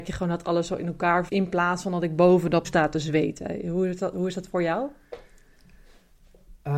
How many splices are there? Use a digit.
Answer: 2